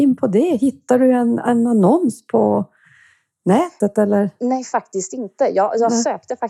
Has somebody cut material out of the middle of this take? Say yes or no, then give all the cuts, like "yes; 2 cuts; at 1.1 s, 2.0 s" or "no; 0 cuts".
no; 0 cuts